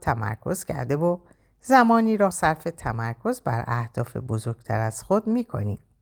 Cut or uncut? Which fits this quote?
cut